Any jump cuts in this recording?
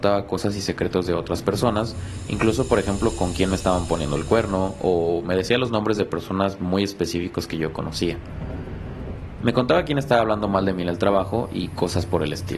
no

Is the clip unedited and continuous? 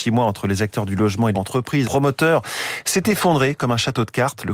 no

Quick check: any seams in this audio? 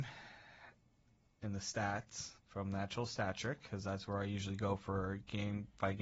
yes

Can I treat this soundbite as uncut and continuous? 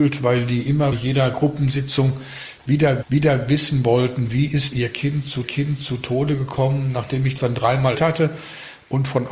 no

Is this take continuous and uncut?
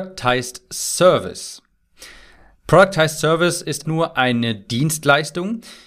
no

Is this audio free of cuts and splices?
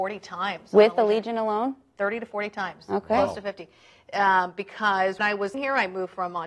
no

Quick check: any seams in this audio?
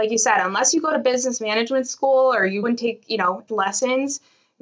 yes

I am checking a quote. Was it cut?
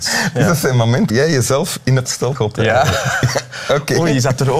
yes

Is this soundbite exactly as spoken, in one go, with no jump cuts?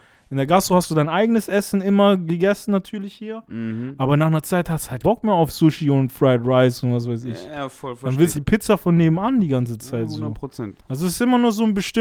no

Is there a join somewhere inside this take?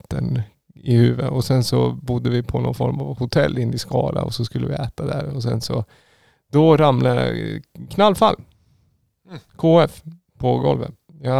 no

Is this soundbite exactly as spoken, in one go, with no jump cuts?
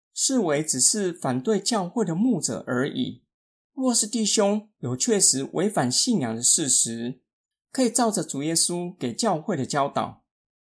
yes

